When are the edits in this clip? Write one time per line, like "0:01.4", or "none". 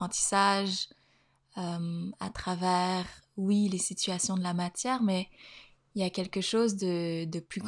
none